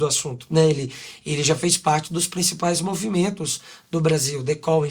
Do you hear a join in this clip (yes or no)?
no